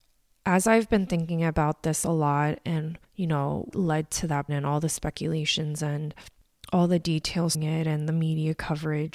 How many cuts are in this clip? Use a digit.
4